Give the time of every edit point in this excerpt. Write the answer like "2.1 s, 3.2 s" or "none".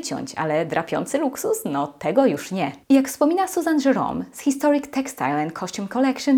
2.8 s